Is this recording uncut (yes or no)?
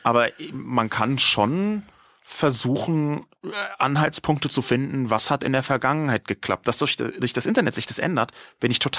yes